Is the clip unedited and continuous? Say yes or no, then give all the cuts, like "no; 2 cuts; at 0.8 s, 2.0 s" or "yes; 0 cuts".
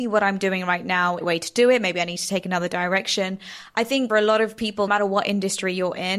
no; 3 cuts; at 1.2 s, 4.1 s, 4.9 s